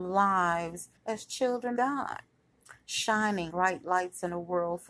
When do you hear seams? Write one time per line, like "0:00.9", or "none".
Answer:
0:01.0
0:01.8
0:03.5